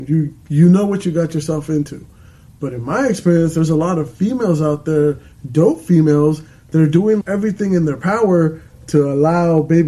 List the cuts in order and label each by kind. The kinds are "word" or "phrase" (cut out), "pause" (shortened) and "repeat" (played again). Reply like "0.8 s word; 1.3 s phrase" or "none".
7.2 s word